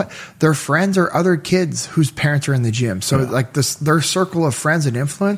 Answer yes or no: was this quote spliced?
no